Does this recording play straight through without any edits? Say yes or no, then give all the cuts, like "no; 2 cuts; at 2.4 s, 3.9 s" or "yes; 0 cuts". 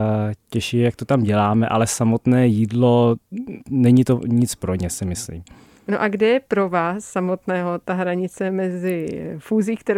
yes; 0 cuts